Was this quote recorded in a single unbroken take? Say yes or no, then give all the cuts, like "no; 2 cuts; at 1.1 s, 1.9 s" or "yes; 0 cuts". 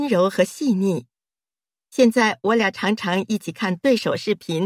yes; 0 cuts